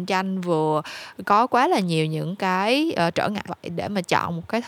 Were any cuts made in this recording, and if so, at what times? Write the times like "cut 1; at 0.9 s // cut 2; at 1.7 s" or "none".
cut 1; at 3.5 s